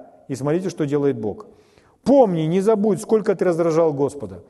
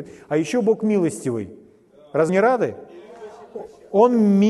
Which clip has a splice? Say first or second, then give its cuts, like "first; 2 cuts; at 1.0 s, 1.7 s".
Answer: second; 1 cut; at 2.3 s